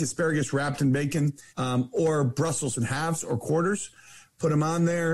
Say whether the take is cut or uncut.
cut